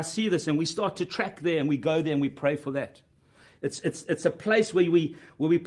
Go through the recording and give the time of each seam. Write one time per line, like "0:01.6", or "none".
none